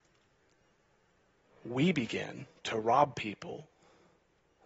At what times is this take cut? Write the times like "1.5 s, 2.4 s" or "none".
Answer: none